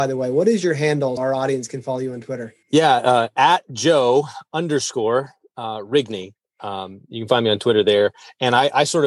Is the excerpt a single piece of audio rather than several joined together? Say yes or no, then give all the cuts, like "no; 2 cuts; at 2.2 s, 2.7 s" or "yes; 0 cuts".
no; 2 cuts; at 1.2 s, 2.6 s